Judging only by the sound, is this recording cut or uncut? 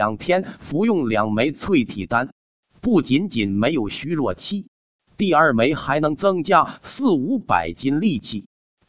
uncut